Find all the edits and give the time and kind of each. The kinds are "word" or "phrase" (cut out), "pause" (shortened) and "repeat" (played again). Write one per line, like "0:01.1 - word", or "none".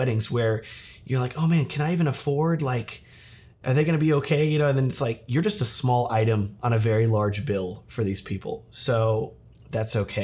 none